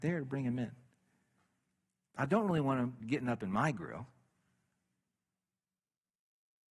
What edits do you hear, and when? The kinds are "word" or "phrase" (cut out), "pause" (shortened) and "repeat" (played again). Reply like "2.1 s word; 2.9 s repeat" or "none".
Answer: none